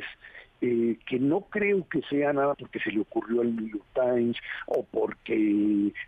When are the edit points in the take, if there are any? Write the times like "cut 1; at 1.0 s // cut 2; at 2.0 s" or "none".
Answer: cut 1; at 2.5 s